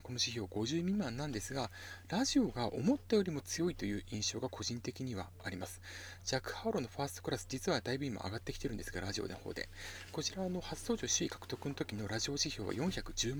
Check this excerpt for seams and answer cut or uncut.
uncut